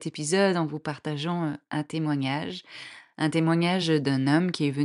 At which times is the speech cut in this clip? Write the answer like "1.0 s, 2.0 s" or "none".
none